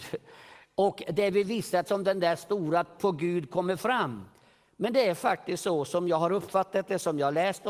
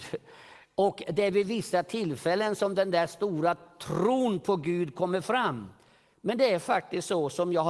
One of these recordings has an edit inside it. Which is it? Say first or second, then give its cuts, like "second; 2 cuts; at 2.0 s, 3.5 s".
first; 2 cuts; at 1.9 s, 3.0 s